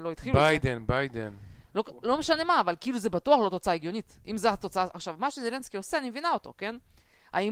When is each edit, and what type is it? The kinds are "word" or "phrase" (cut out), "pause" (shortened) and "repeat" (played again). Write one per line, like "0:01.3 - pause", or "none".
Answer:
0:04.9 - word